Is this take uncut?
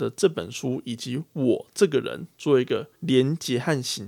no; 1 cut; at 3.0 s

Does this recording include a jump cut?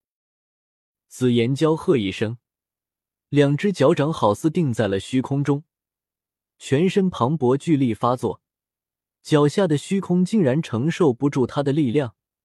no; 0 cuts

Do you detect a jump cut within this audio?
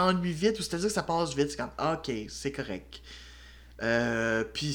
no; 0 cuts

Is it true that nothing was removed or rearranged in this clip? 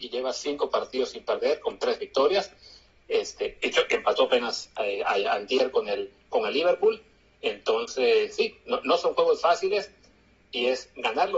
yes; 0 cuts

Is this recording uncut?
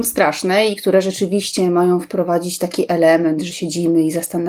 yes; 0 cuts

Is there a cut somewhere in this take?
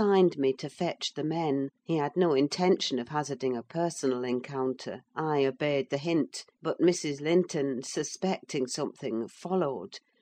yes; 3 cuts; at 1.8 s, 5.1 s, 6.5 s

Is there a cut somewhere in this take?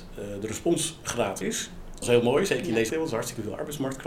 yes; 3 cuts; at 1.4 s, 2.0 s, 2.9 s

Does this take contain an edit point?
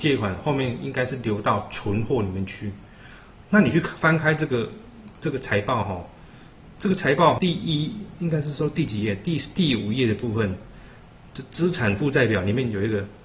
yes; 2 cuts; at 7.4 s, 11.3 s

